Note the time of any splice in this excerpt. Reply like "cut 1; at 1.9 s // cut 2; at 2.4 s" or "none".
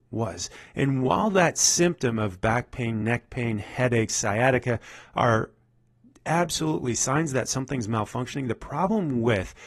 none

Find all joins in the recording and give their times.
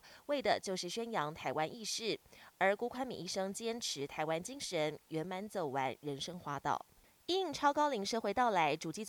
none

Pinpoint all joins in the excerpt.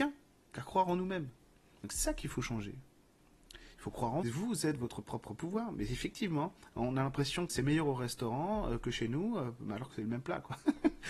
cut 1; at 4.2 s // cut 2; at 7.5 s

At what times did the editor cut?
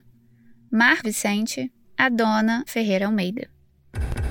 cut 1; at 1.0 s // cut 2; at 1.8 s // cut 3; at 2.7 s

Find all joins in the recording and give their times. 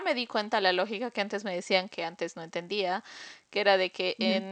none

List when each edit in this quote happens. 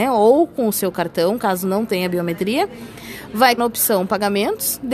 cut 1; at 3.6 s

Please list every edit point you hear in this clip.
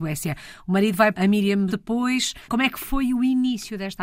cut 1; at 1.1 s // cut 2; at 1.7 s // cut 3; at 2.4 s

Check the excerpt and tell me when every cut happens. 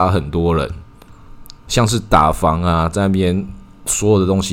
cut 1; at 1.6 s

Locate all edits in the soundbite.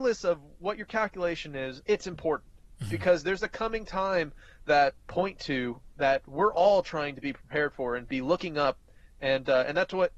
cut 1; at 1.8 s // cut 2; at 5.0 s

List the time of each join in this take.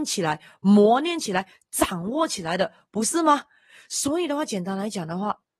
none

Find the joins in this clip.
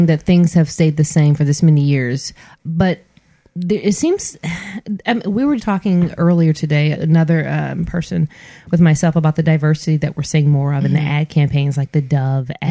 cut 1; at 2.6 s // cut 2; at 5.6 s // cut 3; at 6.9 s

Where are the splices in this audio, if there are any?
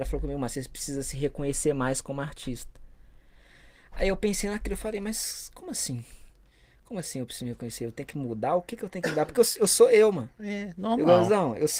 none

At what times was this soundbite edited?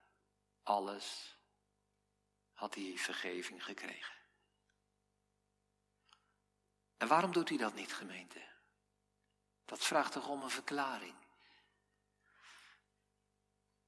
none

